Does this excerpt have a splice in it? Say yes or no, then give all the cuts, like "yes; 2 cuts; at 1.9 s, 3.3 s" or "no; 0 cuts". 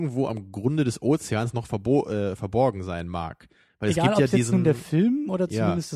no; 0 cuts